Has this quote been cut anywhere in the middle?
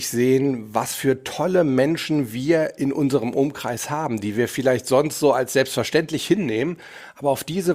no; 0 cuts

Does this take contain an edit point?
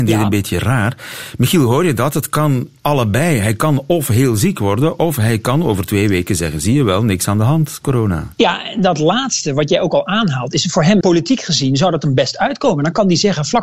yes; 1 cut; at 11.0 s

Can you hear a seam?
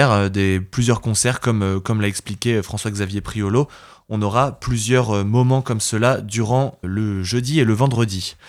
yes; 1 cut; at 6.8 s

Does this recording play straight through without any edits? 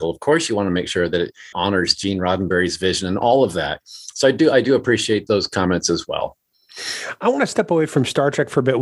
no; 2 cuts; at 1.5 s, 5.3 s

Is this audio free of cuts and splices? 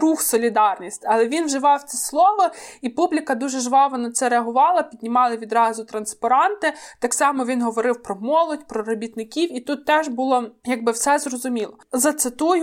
yes; 0 cuts

